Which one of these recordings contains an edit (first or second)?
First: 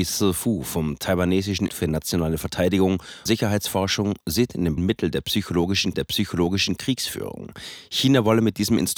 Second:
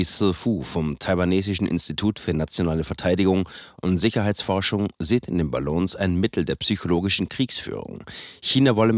first